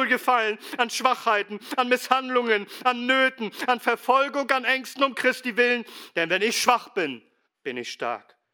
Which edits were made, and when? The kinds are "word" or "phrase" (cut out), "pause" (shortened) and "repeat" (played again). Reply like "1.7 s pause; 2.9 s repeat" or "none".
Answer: 7.4 s word